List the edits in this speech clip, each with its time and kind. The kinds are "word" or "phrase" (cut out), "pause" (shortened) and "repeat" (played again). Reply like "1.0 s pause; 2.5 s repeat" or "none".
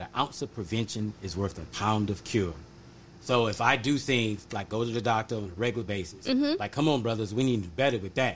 none

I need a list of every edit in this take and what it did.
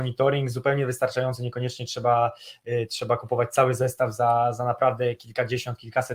none

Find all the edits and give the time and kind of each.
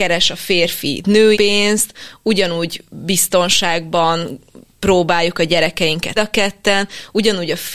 1.3 s word; 6.2 s word

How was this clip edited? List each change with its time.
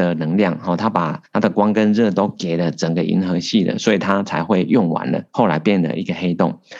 1.3 s pause; 5.3 s pause

